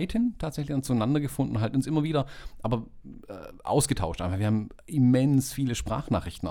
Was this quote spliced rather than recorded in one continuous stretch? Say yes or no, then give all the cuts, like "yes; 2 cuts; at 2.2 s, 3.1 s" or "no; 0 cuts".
no; 0 cuts